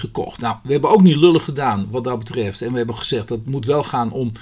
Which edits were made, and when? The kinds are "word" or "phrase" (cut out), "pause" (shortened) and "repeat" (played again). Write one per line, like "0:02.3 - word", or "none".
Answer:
none